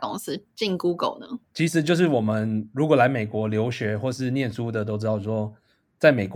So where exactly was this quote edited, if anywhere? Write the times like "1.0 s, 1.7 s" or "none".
none